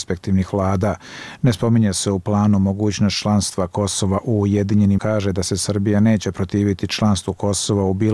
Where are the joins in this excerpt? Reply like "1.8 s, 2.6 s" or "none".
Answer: 5.0 s